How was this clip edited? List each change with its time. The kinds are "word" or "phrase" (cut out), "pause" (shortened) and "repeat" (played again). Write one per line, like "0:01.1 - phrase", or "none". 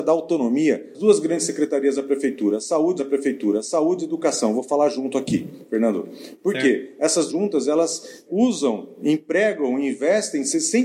0:00.9 - word
0:03.0 - repeat
0:07.3 - phrase
0:08.3 - word